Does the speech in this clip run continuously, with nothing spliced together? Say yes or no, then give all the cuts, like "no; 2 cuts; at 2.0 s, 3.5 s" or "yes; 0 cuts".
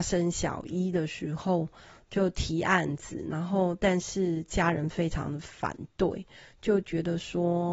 yes; 0 cuts